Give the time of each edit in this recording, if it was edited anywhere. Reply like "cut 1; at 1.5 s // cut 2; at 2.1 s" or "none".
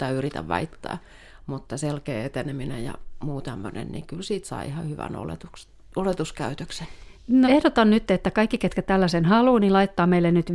cut 1; at 7.4 s